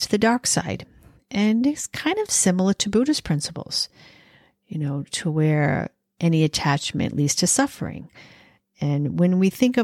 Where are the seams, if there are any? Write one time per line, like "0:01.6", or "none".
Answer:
none